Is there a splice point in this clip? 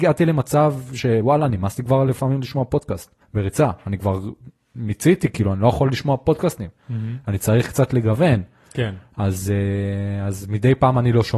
yes; 1 cut; at 3.2 s

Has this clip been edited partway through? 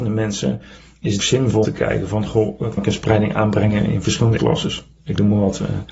yes; 5 cuts; at 1.2 s, 1.6 s, 2.8 s, 3.9 s, 4.4 s

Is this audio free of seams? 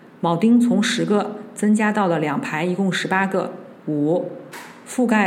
no; 1 cut; at 3.8 s

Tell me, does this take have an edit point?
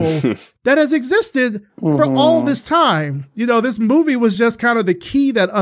no; 0 cuts

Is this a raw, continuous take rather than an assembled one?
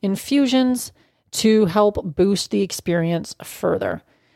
yes; 0 cuts

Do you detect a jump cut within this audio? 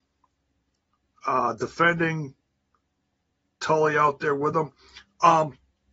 no; 0 cuts

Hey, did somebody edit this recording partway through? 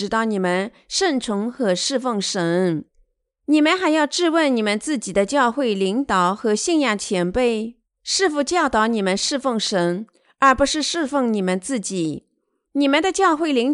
no; 0 cuts

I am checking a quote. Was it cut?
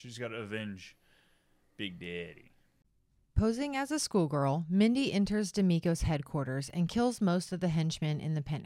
no; 0 cuts

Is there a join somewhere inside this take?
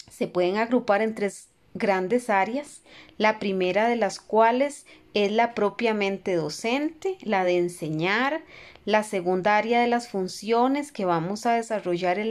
no; 0 cuts

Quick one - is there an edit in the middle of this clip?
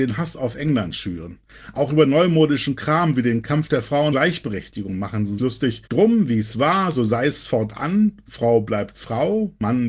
yes; 3 cuts; at 4.1 s, 5.4 s, 5.9 s

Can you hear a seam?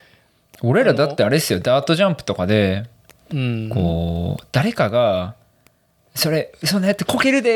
no; 0 cuts

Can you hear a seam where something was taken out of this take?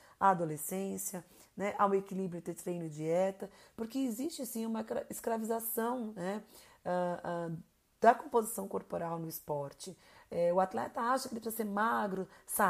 no; 0 cuts

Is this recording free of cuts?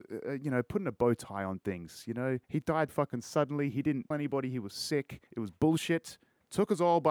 no; 4 cuts; at 2.4 s, 2.9 s, 4.1 s, 5.3 s

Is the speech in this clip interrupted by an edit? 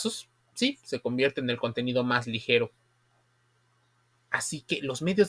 no; 0 cuts

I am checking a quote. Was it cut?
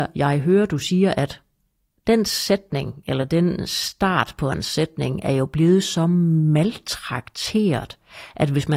no; 0 cuts

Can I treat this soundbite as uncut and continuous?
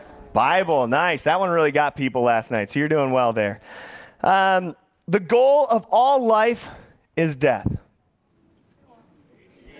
yes; 0 cuts

